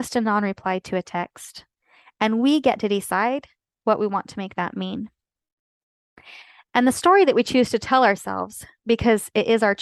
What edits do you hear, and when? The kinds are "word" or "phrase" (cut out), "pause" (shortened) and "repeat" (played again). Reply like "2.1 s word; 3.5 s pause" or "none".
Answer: none